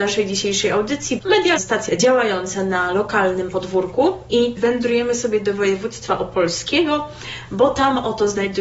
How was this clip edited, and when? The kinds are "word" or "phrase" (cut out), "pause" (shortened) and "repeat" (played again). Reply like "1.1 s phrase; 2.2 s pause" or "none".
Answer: 1.2 s word; 1.6 s word; 1.9 s word; 4.6 s word